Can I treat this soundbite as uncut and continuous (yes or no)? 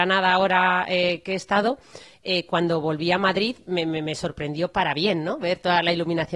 yes